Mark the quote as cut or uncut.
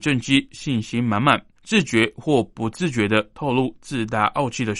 cut